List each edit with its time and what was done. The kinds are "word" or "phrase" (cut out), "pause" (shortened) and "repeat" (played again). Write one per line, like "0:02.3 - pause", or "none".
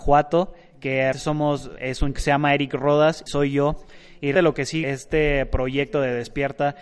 0:01.1 - word
0:01.8 - word
0:02.1 - word
0:03.3 - word
0:04.4 - word
0:04.8 - word